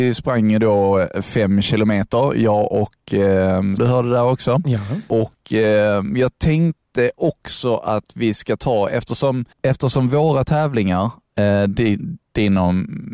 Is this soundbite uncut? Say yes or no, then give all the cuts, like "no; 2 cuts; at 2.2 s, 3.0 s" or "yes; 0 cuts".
no; 2 cuts; at 3.8 s, 9.5 s